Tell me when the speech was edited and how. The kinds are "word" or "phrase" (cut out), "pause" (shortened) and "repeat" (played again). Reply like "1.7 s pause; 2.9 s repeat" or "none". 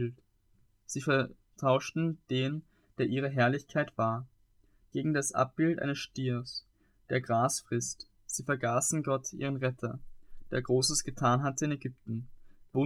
none